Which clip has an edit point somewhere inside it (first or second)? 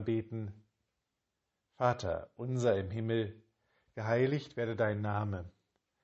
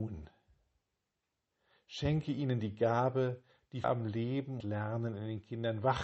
second